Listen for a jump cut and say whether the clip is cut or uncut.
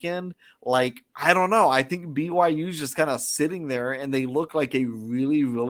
cut